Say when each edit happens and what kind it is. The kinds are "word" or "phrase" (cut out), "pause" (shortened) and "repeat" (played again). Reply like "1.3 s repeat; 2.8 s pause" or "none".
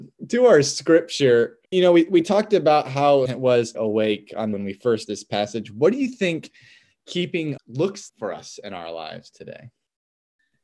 1.6 s pause; 3.3 s word; 3.7 s phrase; 4.5 s word; 5.1 s word; 7.6 s word; 8.1 s word

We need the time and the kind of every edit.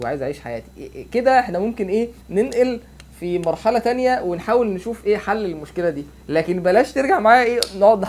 2.2 s pause; 6.2 s pause

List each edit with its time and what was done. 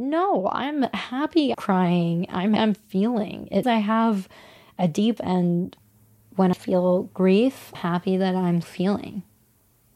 1.5 s word; 2.6 s word; 3.6 s word; 5.2 s word; 6.5 s word; 7.7 s word; 8.6 s word

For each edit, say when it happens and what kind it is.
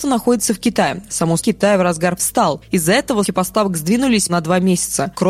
1.4 s word; 2.2 s word; 3.2 s word; 4.3 s word

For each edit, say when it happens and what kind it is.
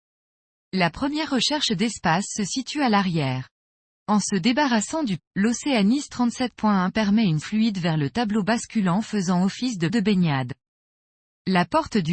5.2 s word; 7.4 s word; 9.9 s word

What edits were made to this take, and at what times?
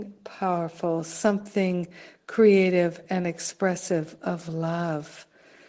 none

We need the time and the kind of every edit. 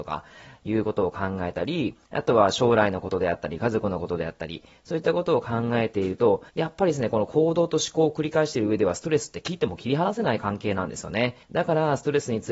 2.0 s pause; 6.5 s pause; 11.4 s pause

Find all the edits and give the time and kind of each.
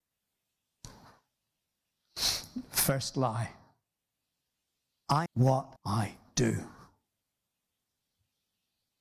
5.3 s word; 5.8 s pause

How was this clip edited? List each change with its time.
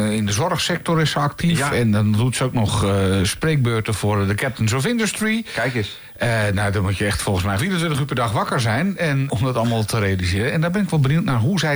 7.6 s word; 9.3 s word

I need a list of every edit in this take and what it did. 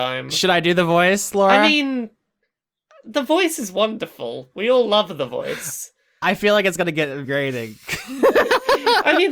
7.2 s word

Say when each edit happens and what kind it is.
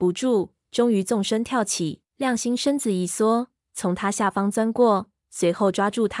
2.1 s pause

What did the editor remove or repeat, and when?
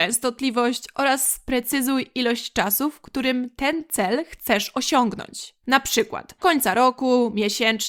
6.4 s word

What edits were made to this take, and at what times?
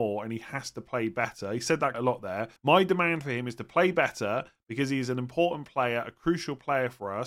1.9 s word; 2.6 s pause

